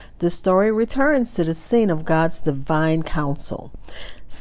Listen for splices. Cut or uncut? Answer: uncut